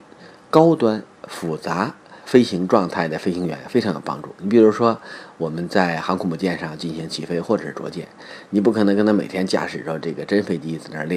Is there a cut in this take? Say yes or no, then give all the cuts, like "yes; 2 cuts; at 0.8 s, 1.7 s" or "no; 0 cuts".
yes; 1 cut; at 2.2 s